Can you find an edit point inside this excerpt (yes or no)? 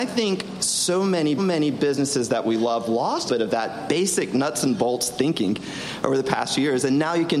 yes